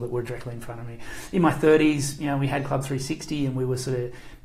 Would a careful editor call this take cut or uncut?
uncut